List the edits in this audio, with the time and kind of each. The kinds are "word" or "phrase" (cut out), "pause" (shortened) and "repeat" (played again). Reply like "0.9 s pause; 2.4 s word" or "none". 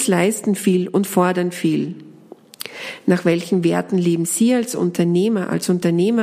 none